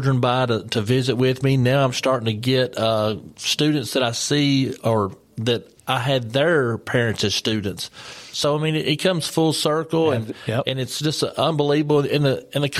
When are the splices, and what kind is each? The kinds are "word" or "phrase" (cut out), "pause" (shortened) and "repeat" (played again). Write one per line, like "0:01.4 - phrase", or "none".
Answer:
0:05.8 - pause